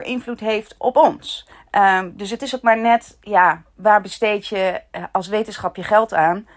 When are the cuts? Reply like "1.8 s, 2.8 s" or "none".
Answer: 1.5 s